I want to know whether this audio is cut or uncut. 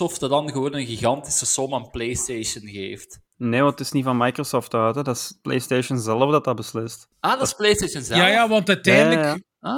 cut